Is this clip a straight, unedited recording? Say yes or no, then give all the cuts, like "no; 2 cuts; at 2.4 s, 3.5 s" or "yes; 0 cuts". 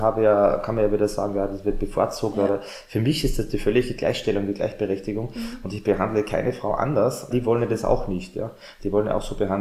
no; 1 cut; at 7.3 s